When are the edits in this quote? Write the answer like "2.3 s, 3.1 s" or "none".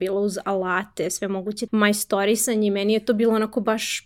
1.7 s